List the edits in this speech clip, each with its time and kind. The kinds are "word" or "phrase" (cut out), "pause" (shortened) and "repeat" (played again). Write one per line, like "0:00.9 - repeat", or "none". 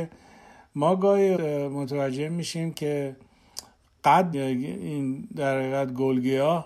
0:01.4 - word
0:04.3 - word